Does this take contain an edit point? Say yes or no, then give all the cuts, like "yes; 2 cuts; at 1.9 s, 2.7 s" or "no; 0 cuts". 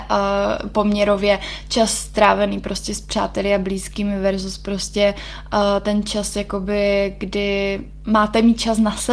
no; 0 cuts